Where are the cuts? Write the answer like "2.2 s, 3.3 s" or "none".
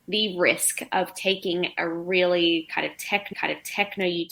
3.3 s